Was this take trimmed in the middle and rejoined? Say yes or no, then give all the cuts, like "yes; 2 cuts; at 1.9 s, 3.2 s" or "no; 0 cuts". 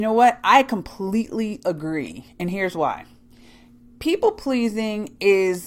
no; 0 cuts